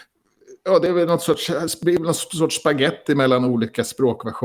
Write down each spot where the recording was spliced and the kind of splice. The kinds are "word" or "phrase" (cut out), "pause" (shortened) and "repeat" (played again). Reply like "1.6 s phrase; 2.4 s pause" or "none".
none